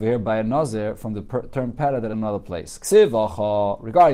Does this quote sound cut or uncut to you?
cut